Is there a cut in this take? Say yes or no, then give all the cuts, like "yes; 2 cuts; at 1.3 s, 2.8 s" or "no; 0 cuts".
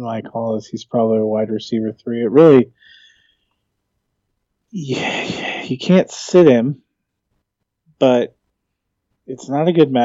no; 0 cuts